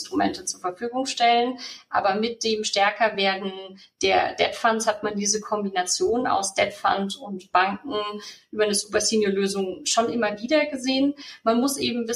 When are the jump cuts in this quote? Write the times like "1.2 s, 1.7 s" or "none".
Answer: none